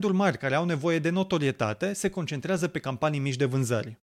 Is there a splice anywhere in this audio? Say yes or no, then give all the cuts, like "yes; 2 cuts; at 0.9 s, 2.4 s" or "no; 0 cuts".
no; 0 cuts